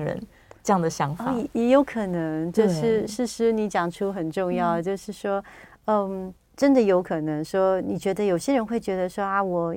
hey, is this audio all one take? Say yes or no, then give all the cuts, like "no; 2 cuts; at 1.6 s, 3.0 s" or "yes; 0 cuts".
no; 1 cut; at 6.4 s